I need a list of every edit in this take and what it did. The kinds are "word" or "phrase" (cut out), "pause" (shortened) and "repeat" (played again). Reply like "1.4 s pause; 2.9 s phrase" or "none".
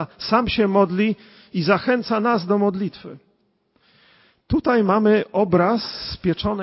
none